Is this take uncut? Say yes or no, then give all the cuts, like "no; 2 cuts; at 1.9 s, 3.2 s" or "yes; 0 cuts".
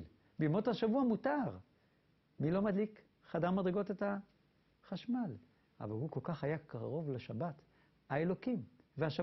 yes; 0 cuts